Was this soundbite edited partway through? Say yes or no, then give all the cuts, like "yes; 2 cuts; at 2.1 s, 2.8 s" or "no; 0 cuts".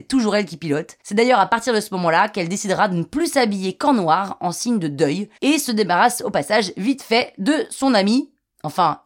yes; 2 cuts; at 1.0 s, 5.4 s